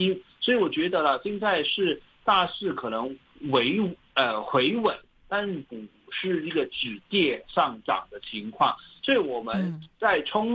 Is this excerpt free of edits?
yes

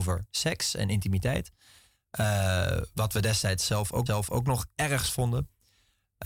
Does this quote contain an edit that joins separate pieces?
yes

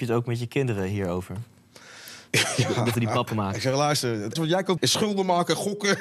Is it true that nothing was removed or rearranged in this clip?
no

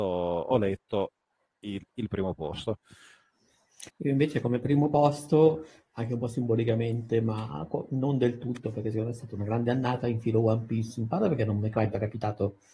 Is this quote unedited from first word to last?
no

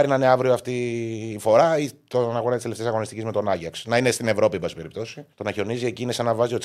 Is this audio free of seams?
no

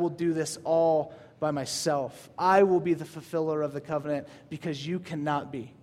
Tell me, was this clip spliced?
no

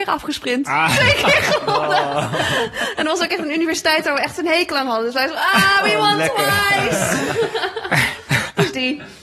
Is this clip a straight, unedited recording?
yes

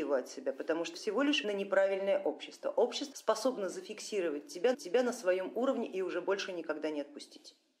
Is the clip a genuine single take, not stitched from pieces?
no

